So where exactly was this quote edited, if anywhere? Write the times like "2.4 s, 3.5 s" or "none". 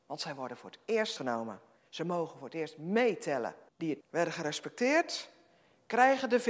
1.2 s, 1.8 s, 3.7 s, 4.0 s